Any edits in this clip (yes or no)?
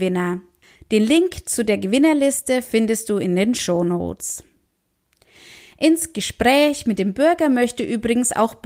no